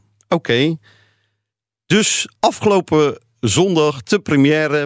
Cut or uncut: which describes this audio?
cut